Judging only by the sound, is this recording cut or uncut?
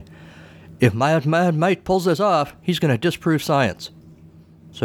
uncut